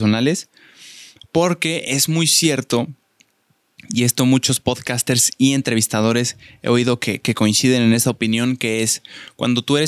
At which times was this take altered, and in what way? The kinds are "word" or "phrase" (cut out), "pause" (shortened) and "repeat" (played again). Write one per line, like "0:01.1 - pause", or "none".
none